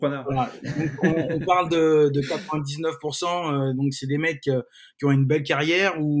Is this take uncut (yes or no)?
yes